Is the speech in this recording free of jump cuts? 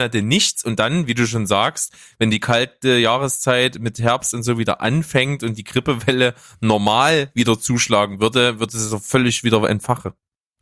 yes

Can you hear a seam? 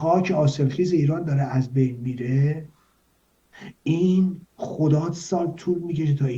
yes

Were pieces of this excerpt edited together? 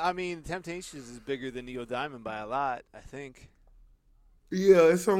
no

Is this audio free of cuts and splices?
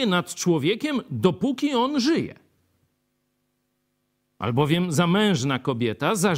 yes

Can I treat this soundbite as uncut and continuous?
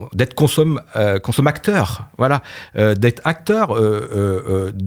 yes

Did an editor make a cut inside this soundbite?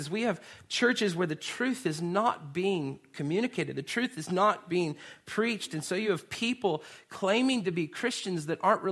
no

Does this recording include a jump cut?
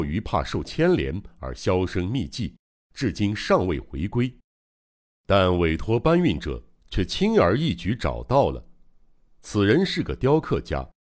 no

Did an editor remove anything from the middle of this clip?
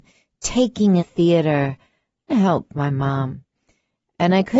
yes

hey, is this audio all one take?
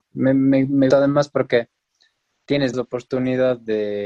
no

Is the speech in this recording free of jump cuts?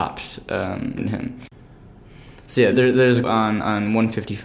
no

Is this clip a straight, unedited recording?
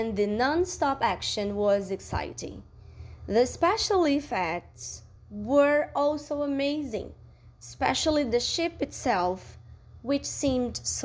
yes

